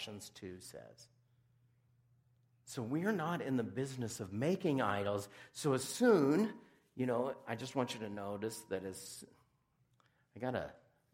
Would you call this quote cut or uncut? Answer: uncut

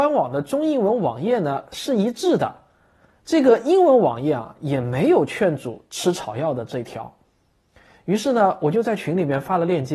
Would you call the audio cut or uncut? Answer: uncut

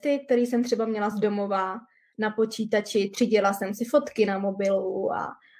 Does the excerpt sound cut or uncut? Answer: uncut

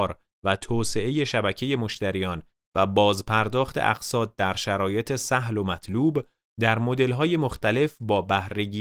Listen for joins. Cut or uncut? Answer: uncut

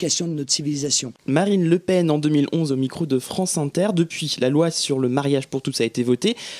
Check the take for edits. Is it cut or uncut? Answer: cut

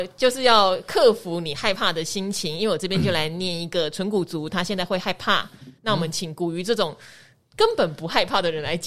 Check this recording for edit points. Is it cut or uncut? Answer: uncut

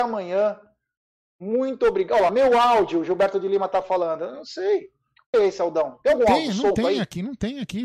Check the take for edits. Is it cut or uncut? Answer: cut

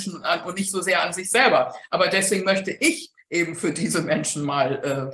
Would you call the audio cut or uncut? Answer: uncut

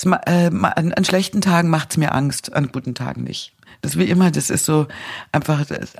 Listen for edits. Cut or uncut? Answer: uncut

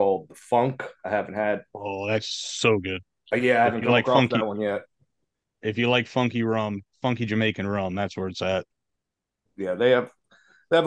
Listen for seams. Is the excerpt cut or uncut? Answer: uncut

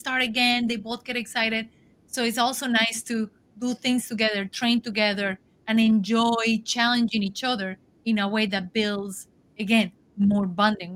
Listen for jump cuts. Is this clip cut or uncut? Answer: uncut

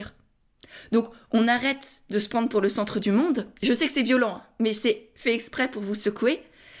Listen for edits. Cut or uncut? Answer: uncut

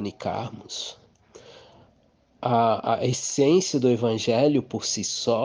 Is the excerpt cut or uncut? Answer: uncut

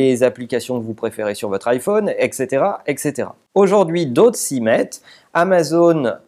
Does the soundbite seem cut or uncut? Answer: uncut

